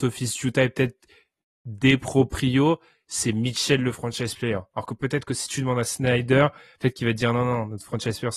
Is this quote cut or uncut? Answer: uncut